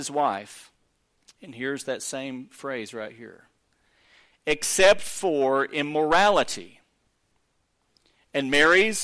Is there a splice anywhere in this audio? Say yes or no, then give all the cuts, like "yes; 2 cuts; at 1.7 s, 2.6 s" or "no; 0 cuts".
yes; 1 cut; at 0.9 s